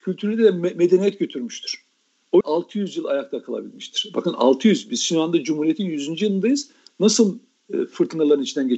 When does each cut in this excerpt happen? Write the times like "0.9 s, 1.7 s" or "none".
2.4 s